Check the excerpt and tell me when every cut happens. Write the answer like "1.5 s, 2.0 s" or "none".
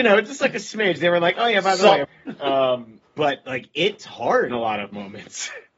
2.0 s, 3.1 s, 4.0 s, 4.5 s